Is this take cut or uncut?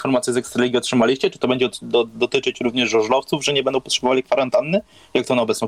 uncut